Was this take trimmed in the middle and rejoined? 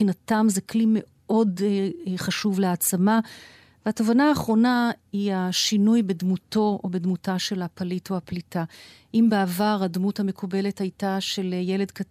no; 0 cuts

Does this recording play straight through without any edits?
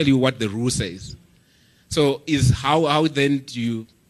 yes; 0 cuts

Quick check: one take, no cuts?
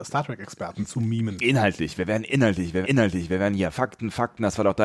no; 2 cuts; at 2.8 s, 3.7 s

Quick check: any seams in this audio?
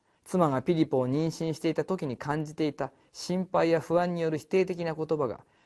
no; 0 cuts

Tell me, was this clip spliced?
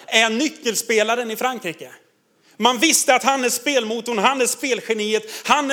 no; 0 cuts

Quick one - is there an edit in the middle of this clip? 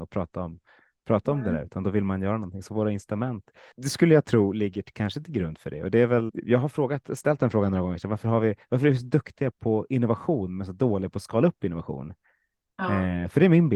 yes; 3 cuts; at 3.7 s, 6.3 s, 9.5 s

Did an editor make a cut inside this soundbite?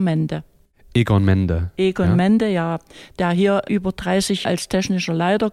yes; 2 cuts; at 3.6 s, 4.4 s

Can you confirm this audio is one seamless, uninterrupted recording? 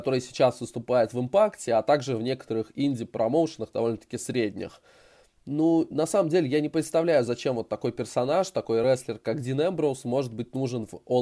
yes; 0 cuts

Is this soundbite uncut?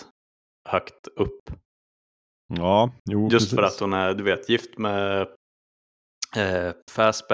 yes; 0 cuts

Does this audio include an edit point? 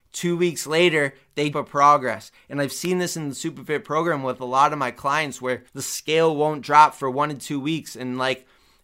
yes; 2 cuts; at 1.5 s, 5.7 s

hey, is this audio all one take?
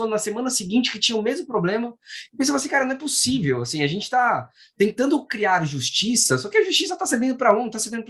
yes; 0 cuts

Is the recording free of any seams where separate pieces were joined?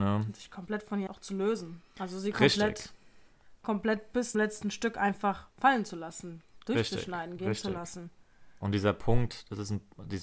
no; 3 cuts; at 1.1 s, 4.3 s, 5.5 s

